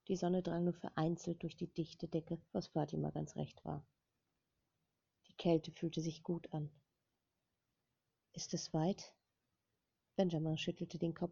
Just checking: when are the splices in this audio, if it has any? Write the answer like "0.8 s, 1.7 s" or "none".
2.5 s